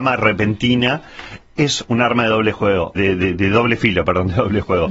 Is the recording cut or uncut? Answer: cut